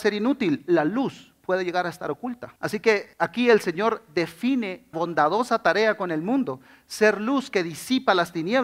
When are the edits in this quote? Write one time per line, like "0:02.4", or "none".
0:02.6
0:03.1
0:04.9